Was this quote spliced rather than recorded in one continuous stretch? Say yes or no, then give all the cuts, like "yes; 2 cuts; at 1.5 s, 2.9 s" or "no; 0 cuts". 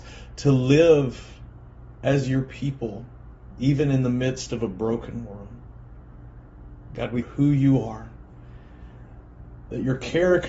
yes; 1 cut; at 7.2 s